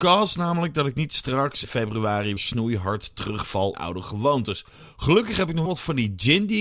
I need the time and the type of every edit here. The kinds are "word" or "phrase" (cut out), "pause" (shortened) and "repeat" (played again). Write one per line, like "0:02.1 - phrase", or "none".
0:01.6 - word
0:02.4 - word
0:03.7 - word
0:05.7 - word